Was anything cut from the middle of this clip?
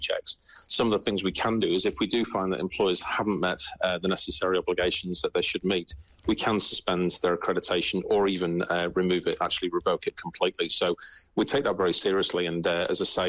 no; 0 cuts

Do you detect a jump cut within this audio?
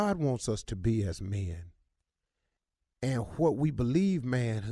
no; 0 cuts

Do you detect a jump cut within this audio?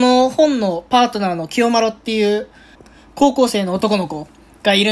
yes; 1 cut; at 2.7 s

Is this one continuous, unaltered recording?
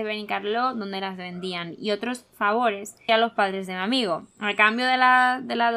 no; 2 cuts; at 3.1 s, 4.3 s

